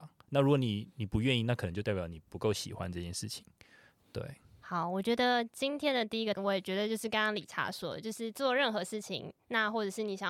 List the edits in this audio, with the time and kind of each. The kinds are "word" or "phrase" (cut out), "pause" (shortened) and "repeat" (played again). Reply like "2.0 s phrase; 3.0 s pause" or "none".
6.3 s word

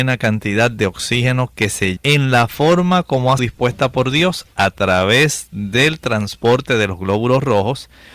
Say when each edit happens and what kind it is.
2.0 s word; 3.4 s word

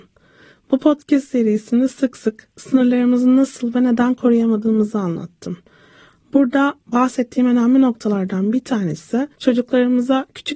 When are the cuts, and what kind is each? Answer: 6.8 s pause; 9.3 s pause

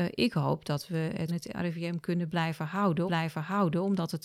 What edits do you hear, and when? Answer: 1.3 s word; 3.1 s repeat

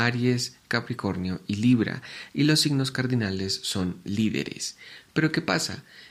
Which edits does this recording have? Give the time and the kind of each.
none

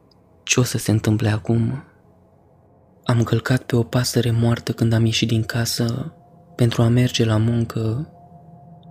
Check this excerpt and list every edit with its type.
none

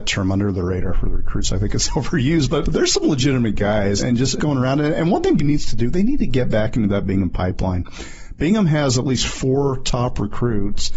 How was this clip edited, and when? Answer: 2.6 s word; 4.0 s word; 4.4 s word; 5.4 s word

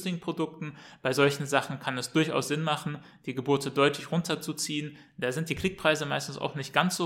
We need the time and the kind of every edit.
none

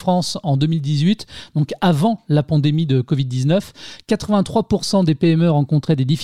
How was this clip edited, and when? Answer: none

